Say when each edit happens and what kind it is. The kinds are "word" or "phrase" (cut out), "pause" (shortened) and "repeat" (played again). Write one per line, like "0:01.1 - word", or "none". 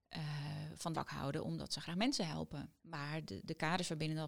0:00.9 - word
0:02.8 - pause